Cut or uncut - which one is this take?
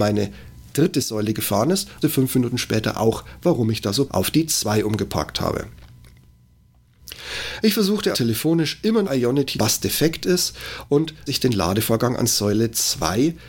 cut